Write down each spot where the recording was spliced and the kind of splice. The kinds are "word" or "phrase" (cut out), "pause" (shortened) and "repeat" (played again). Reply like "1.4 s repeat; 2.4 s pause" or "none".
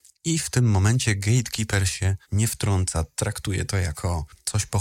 2.2 s pause